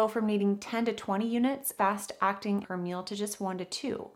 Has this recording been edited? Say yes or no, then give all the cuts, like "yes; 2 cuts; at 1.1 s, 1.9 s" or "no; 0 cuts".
yes; 2 cuts; at 1.8 s, 2.6 s